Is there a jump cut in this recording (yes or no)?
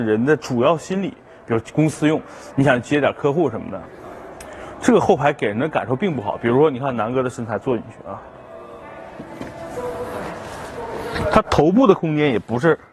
no